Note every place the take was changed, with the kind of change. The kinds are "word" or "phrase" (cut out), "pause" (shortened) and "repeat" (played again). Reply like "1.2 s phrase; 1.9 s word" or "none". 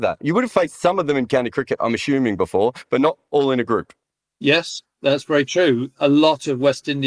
none